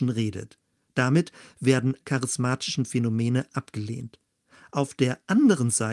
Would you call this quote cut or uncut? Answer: cut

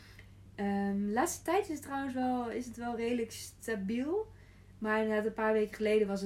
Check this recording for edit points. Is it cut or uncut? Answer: uncut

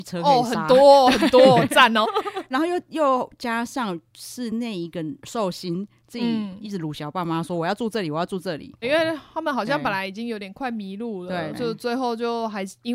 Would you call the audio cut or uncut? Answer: cut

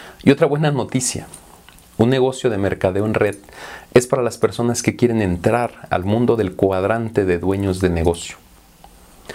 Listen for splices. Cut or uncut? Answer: uncut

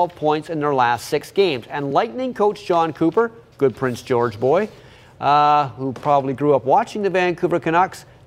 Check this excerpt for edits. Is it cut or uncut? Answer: uncut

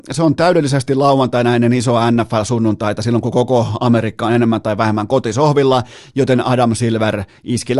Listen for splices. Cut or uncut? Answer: uncut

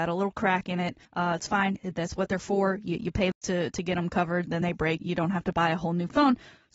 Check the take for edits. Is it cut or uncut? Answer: cut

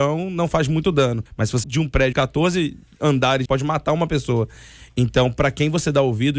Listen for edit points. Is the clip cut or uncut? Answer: cut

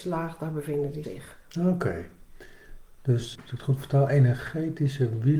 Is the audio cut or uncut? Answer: cut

